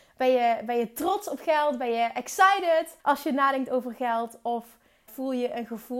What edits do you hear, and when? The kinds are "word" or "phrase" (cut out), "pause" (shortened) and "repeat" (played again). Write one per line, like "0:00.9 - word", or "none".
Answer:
0:03.0 - pause
0:05.1 - word